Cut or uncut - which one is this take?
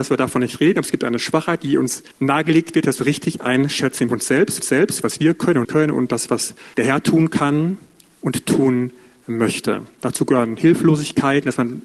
cut